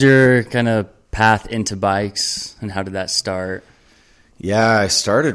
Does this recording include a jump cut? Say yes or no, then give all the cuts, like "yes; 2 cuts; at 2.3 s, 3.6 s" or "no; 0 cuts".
no; 0 cuts